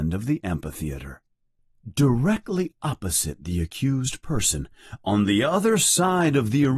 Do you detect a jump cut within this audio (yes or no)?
no